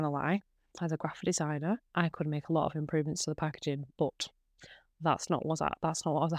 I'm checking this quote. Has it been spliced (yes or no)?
yes